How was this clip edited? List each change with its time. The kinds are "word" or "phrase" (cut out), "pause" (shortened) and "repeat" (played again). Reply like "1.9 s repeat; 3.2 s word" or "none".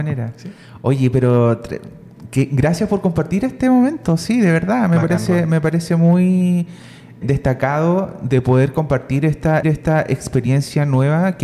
7.2 s word; 9.6 s repeat